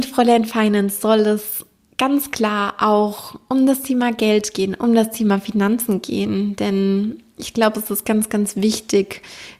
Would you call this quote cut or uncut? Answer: uncut